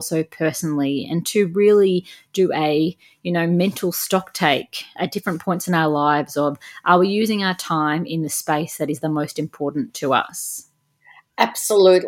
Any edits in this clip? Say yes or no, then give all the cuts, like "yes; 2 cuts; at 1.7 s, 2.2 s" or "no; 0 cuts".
yes; 1 cut; at 5.0 s